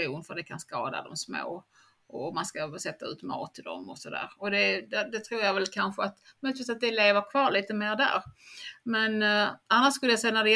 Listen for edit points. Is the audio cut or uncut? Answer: uncut